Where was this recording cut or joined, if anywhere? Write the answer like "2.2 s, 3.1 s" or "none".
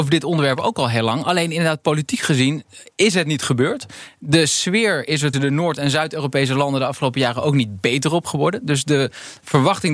5.3 s